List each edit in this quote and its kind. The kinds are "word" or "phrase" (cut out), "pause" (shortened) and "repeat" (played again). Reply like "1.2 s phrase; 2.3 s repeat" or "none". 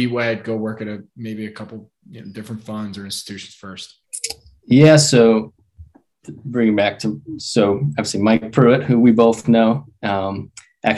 none

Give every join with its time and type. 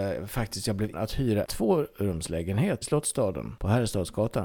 0.9 s word; 1.5 s word; 2.8 s word

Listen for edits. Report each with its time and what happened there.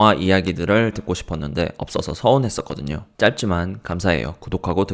0.9 s word

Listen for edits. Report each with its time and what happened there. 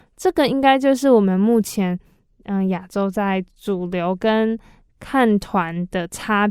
none

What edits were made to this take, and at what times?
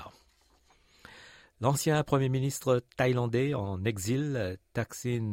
none

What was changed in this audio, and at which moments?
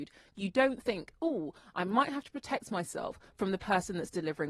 none

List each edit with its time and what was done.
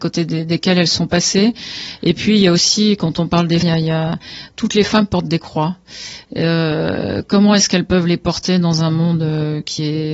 3.6 s word

